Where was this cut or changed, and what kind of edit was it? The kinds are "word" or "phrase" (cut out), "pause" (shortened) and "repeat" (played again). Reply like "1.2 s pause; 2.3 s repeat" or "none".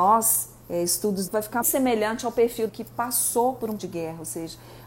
1.3 s word; 1.6 s word; 2.7 s word; 3.8 s word